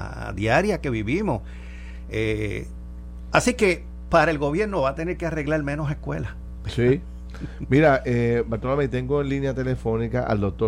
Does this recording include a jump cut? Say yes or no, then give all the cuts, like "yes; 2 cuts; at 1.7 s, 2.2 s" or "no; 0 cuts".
no; 0 cuts